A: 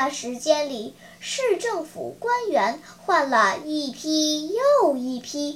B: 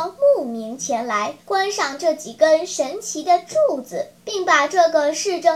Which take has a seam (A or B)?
B